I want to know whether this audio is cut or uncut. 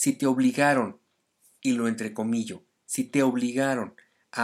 uncut